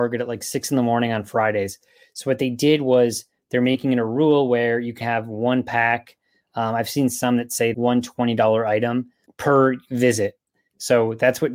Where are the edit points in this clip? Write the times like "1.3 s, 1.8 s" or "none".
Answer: 5.0 s, 7.7 s, 9.3 s

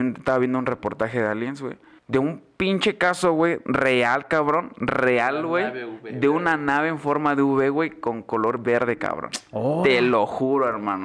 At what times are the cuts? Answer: 2.0 s

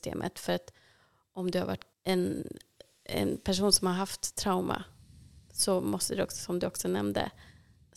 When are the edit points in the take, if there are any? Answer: 1.9 s

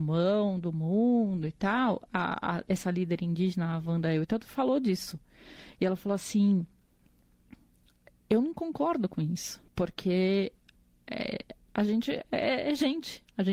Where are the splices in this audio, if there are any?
9.7 s

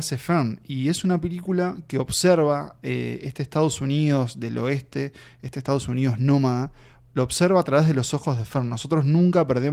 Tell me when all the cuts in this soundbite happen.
none

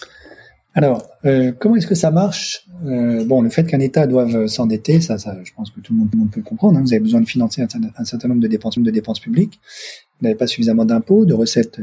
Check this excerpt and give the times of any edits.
6.1 s, 8.8 s

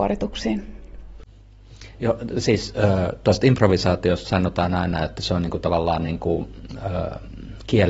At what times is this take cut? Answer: none

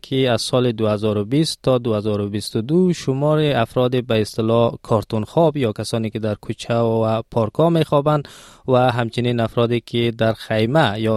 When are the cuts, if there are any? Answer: none

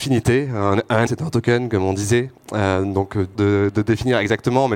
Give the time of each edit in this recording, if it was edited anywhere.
1.1 s, 3.3 s

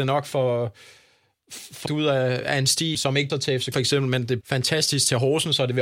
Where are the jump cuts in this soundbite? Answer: 1.9 s, 2.9 s, 3.3 s, 3.7 s, 4.4 s

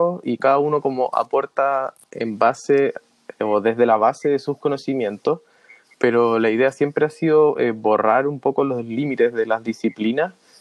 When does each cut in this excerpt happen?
none

